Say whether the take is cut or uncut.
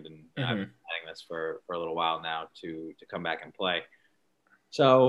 uncut